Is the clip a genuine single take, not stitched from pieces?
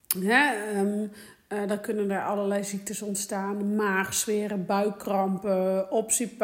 yes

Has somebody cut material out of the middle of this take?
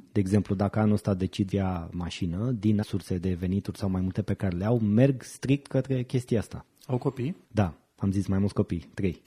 yes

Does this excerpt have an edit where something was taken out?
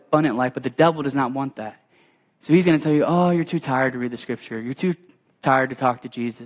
no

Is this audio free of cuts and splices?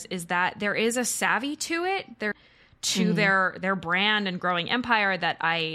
no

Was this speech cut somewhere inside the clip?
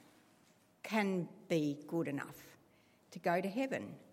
no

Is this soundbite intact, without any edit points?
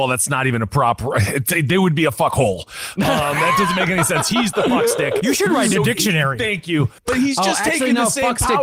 no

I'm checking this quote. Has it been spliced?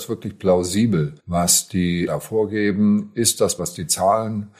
yes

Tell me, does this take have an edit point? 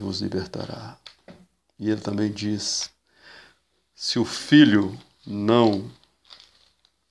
no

